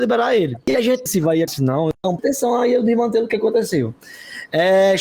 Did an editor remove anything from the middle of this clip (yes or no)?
yes